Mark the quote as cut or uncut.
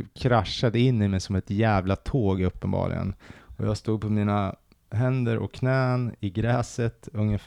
uncut